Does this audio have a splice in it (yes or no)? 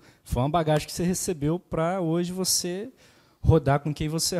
no